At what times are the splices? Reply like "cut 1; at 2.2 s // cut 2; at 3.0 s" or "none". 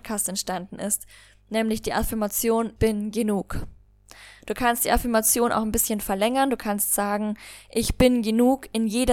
cut 1; at 2.8 s